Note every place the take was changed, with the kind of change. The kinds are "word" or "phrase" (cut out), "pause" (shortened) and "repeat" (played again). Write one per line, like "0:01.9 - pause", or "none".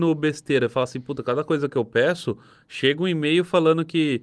none

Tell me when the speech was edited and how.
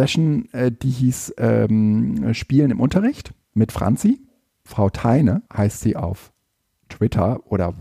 0:05.5 - pause

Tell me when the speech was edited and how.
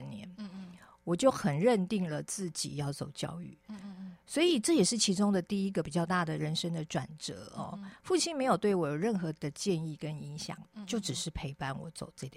0:03.6 - pause

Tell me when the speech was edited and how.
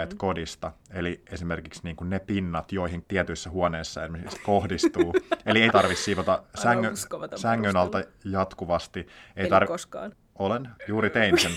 0:03.0 - word
0:05.7 - phrase

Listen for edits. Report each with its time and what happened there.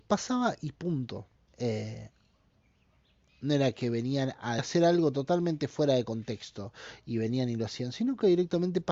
0:01.4 - pause
0:04.6 - phrase

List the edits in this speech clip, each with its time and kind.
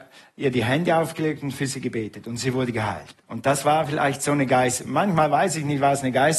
0:03.2 - pause

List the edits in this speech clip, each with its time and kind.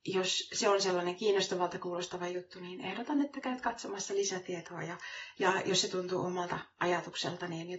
none

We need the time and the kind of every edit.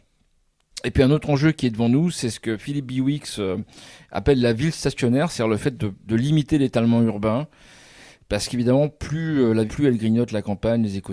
0:09.7 - phrase

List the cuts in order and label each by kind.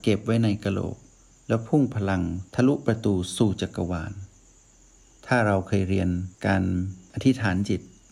0:02.5 - pause
0:06.3 - pause

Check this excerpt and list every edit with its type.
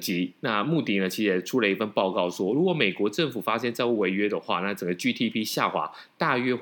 none

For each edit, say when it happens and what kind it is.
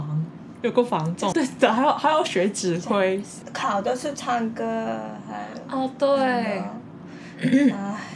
0:01.3 - phrase

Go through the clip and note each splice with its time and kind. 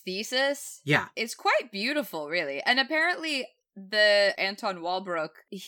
0:04.4 - word

